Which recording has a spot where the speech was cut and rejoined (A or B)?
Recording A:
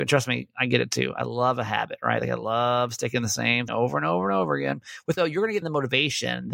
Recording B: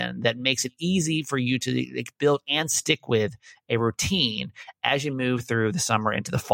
A